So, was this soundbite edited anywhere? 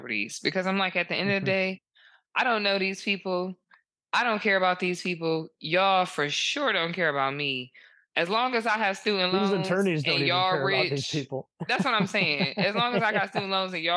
no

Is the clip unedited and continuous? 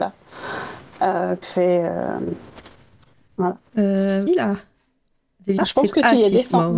no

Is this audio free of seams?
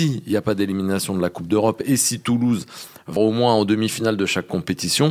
no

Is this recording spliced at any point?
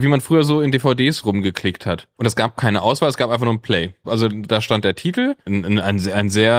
yes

